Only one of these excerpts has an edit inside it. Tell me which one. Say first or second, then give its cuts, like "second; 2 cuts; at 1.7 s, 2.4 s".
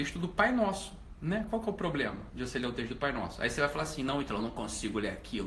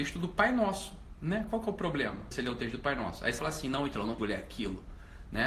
second; 3 cuts; at 2.3 s, 3.4 s, 4.2 s